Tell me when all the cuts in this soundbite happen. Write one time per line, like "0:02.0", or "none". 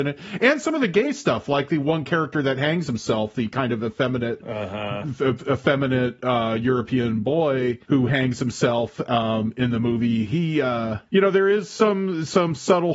0:07.8
0:11.1